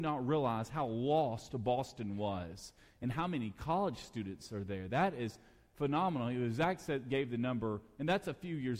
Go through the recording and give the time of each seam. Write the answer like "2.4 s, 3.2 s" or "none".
none